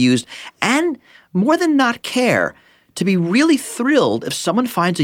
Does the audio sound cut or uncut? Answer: uncut